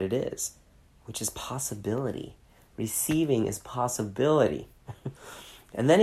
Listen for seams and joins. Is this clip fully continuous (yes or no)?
yes